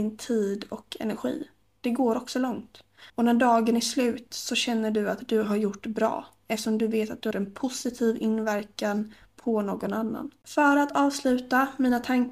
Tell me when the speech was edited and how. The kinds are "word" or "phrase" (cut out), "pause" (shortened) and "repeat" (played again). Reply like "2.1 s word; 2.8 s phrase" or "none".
3.1 s pause; 7.3 s word

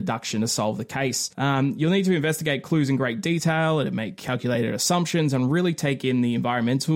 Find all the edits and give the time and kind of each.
1.3 s pause

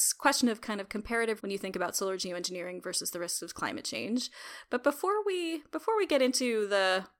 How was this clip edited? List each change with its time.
1.4 s phrase

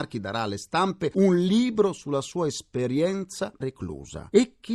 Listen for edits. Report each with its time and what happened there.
3.6 s word

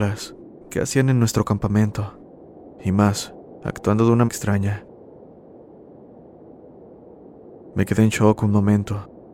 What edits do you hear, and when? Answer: 2.7 s pause; 4.3 s phrase

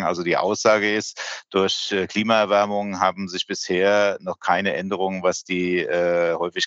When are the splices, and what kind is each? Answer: none

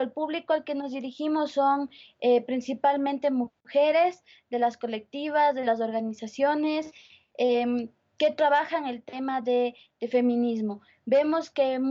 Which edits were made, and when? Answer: none

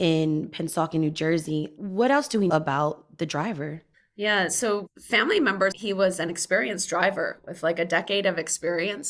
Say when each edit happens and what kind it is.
2.5 s word; 3.9 s pause; 5.7 s word

